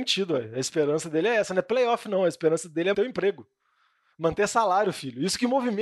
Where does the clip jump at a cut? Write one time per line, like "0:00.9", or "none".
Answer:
0:02.9

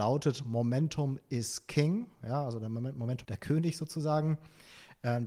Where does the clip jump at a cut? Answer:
0:03.2

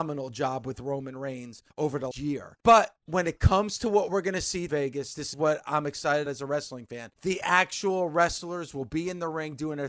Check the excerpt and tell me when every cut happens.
0:01.7
0:02.1
0:02.6
0:04.7
0:05.3
0:06.3
0:07.1

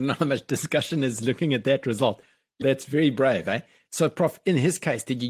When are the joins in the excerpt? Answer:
0:02.6

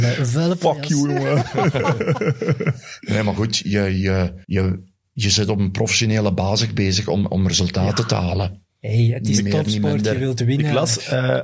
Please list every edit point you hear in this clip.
0:04.4

